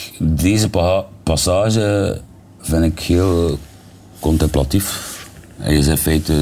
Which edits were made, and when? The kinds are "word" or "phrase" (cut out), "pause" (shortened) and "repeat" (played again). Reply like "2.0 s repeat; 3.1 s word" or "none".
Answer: none